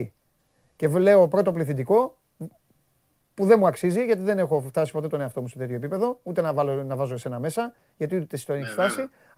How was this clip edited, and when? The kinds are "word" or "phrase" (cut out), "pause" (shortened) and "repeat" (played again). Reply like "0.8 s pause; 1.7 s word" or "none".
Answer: none